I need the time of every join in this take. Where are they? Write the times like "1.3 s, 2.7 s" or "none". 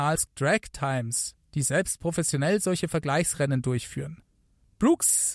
none